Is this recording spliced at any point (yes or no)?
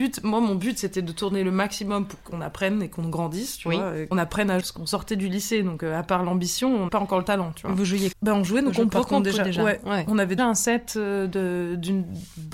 yes